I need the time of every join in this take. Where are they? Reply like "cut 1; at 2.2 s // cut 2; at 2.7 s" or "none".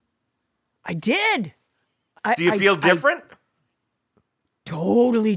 cut 1; at 2.2 s

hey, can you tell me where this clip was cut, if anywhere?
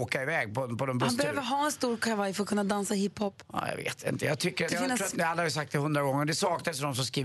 cut 1; at 4.7 s // cut 2; at 5.1 s

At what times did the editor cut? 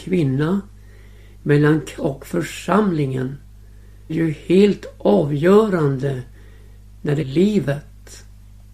cut 1; at 2.0 s // cut 2; at 4.1 s // cut 3; at 7.2 s

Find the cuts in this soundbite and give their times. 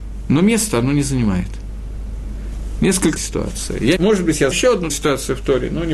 cut 1; at 3.2 s // cut 2; at 4.0 s // cut 3; at 4.5 s // cut 4; at 4.9 s

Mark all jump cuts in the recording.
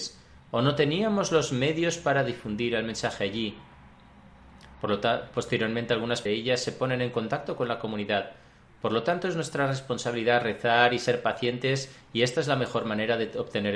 cut 1; at 6.3 s

